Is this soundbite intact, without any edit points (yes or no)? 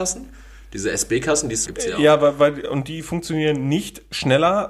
no